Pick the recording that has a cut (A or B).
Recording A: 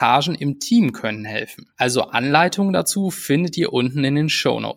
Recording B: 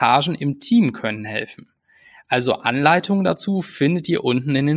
A